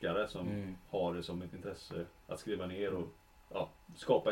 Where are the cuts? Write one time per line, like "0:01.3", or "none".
none